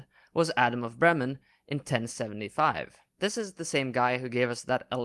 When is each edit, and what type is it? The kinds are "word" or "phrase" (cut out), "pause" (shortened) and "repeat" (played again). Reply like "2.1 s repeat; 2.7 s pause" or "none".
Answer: none